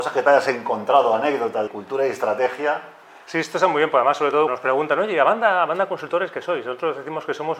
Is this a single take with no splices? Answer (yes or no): no